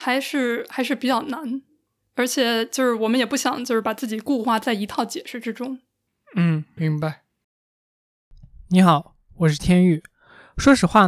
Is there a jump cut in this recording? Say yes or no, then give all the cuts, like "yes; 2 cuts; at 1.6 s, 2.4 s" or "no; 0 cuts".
yes; 1 cut; at 6.8 s